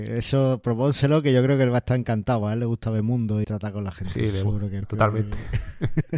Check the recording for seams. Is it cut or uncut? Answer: cut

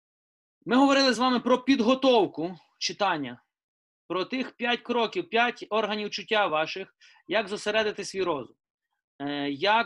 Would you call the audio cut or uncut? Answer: uncut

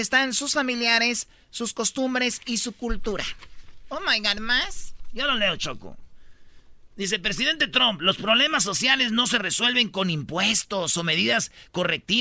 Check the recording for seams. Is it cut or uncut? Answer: uncut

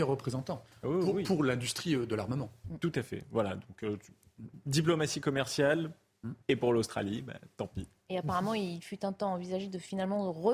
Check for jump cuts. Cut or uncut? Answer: cut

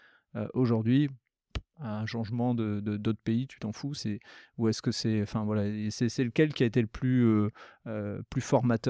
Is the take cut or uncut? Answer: cut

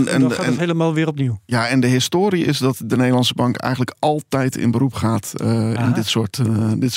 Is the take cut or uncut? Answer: uncut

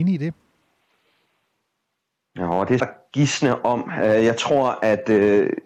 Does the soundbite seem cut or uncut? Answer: cut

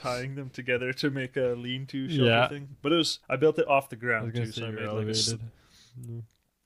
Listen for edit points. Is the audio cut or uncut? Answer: cut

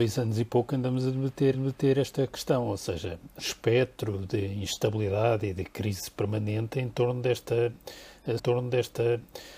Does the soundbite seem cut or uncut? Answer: cut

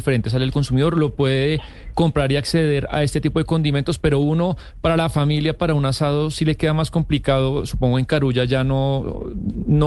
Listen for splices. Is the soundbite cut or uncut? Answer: uncut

